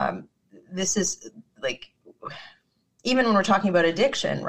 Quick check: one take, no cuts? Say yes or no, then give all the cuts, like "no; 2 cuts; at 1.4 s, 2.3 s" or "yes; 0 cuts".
yes; 0 cuts